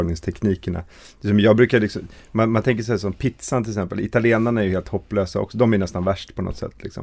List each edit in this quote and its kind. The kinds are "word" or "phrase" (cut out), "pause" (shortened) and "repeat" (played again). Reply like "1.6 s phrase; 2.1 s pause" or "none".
none